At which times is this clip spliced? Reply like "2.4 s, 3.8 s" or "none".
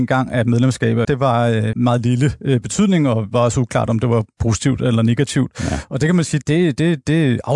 1.0 s, 1.7 s, 6.4 s